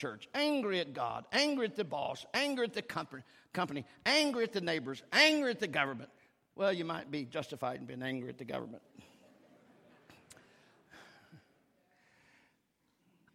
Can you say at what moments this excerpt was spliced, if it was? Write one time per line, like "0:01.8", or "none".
none